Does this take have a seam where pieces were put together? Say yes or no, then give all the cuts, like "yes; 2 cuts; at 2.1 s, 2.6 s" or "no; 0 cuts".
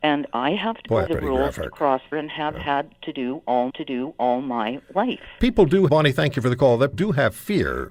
yes; 5 cuts; at 1.1 s, 2.1 s, 3.7 s, 5.9 s, 6.9 s